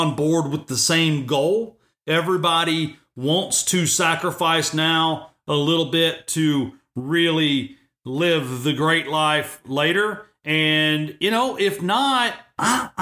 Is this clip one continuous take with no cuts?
yes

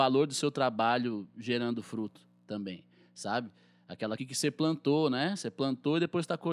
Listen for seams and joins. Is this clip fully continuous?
no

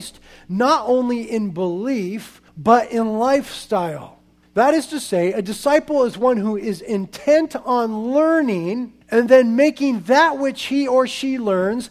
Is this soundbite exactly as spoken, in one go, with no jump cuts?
no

